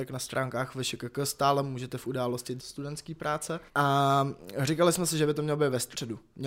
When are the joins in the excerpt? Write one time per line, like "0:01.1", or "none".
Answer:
0:02.6
0:03.7